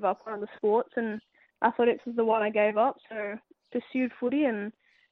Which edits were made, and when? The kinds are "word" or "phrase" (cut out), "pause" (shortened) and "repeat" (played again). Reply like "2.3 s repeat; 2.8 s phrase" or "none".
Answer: none